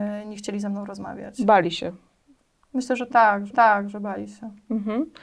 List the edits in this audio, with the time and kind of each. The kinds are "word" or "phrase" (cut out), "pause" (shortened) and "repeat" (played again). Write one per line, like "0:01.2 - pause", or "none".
0:03.5 - repeat